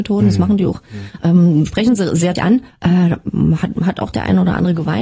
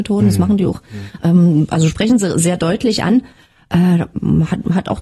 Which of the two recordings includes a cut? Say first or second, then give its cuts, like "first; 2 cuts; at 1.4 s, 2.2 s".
first; 3 cuts; at 1.7 s, 2.4 s, 2.7 s